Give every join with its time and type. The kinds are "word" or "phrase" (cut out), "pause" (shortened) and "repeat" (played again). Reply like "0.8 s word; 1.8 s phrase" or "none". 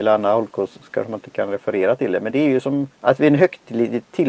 2.3 s word; 2.9 s pause